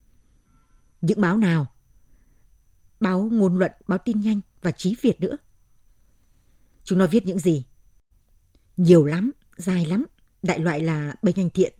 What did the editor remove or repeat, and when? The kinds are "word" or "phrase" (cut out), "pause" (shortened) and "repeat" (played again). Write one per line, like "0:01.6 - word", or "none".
none

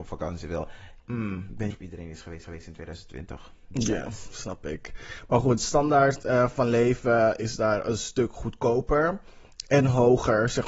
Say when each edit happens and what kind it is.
0:01.0 - pause
0:01.7 - word
0:02.4 - repeat

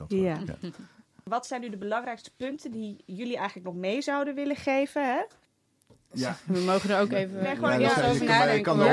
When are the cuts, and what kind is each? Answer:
none

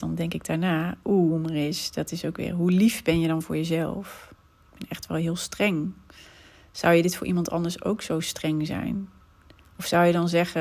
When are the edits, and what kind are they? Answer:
none

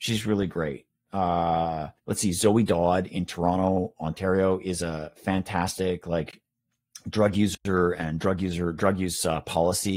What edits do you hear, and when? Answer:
0:02.0 - pause

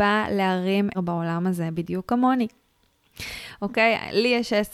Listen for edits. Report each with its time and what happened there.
0:00.9 - phrase

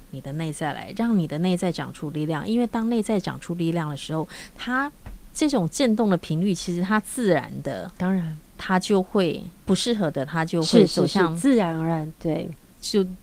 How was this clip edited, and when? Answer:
0:07.9 - pause
0:09.6 - pause

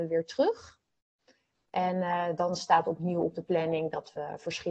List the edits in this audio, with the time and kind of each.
none

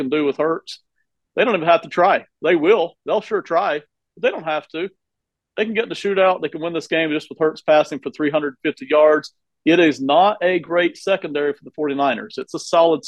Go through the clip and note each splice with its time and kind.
none

